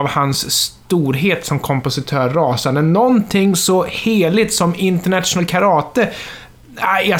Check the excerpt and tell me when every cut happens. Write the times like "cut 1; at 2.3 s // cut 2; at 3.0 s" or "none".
none